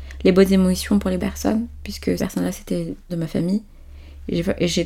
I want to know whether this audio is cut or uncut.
cut